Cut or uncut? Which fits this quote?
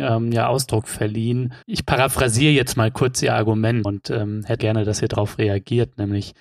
cut